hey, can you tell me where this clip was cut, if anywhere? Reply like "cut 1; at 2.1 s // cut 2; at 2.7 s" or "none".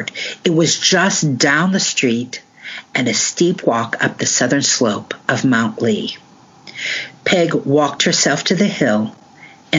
none